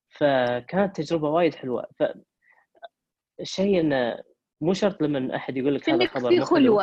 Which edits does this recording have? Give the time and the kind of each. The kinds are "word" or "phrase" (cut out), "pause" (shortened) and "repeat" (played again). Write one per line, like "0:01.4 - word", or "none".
none